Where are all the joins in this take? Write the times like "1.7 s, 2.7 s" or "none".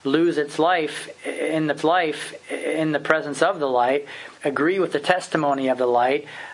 1.8 s, 4.3 s

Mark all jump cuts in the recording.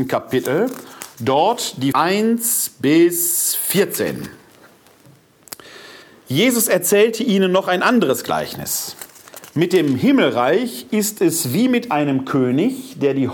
1.9 s, 6.0 s

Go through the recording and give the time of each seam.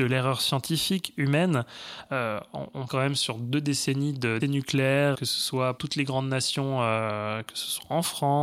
2.9 s, 4.4 s, 5.1 s, 5.8 s

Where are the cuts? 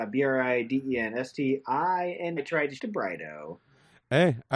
2.4 s, 2.8 s

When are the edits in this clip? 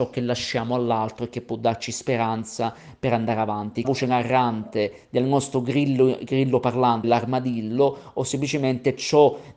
3.8 s, 7.0 s

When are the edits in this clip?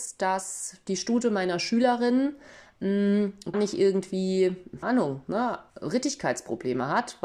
3.5 s, 4.8 s

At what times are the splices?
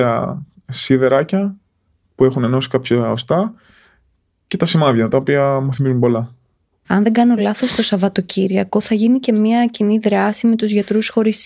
none

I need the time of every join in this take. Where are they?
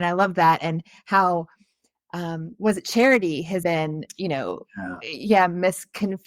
3.6 s

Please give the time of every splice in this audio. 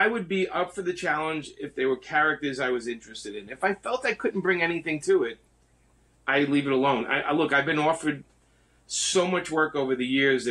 none

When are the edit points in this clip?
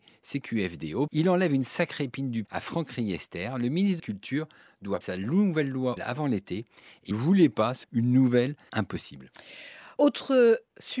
1.1 s, 2.4 s, 4.0 s, 5.0 s, 6.0 s, 7.1 s, 7.8 s, 8.7 s

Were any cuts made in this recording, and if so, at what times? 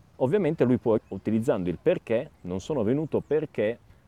1.0 s

